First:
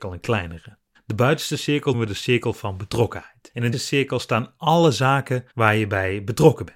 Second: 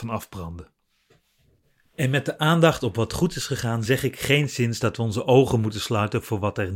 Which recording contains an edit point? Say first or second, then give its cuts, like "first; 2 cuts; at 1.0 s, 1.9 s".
first; 4 cuts; at 0.9 s, 1.9 s, 3.7 s, 5.5 s